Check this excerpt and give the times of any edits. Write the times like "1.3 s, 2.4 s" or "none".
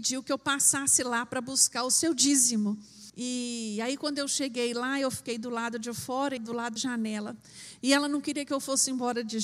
3.1 s, 6.4 s, 6.8 s